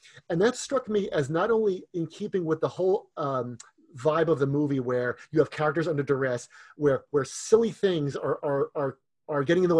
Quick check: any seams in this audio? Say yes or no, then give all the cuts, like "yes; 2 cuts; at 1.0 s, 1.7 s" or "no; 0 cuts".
no; 0 cuts